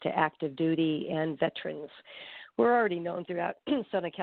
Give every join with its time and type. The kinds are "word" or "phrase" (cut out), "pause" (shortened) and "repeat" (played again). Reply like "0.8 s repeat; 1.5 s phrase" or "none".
none